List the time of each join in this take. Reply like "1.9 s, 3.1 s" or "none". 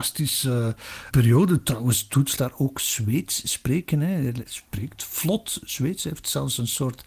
1.1 s, 2.4 s, 4.5 s